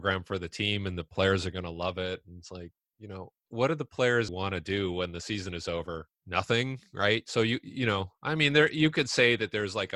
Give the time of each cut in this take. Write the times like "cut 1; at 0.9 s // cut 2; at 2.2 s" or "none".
cut 1; at 3.4 s // cut 2; at 4.3 s // cut 3; at 6.1 s